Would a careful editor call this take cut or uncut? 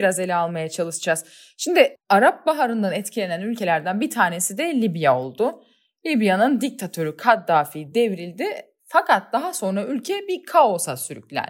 uncut